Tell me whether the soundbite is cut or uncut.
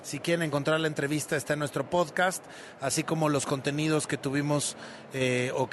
uncut